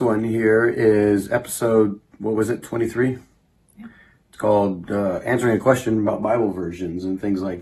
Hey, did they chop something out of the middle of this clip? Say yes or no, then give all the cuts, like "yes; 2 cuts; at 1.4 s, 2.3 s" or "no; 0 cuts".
no; 0 cuts